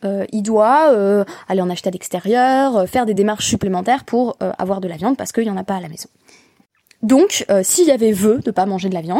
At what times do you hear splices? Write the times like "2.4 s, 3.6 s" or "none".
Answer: none